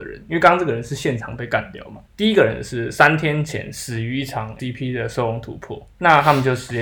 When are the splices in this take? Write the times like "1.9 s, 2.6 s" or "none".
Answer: 2.1 s, 4.6 s, 5.9 s